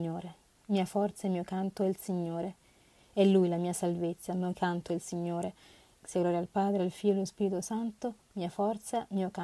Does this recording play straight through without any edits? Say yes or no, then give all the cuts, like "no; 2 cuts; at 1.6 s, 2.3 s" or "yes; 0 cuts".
yes; 0 cuts